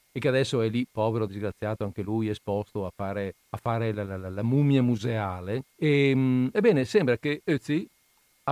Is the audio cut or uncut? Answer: cut